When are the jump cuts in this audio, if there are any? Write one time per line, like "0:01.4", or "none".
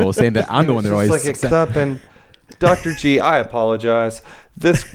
0:01.5
0:02.1